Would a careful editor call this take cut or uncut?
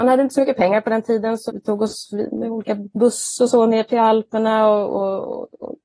cut